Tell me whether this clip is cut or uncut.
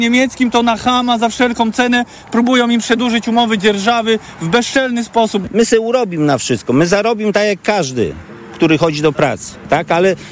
uncut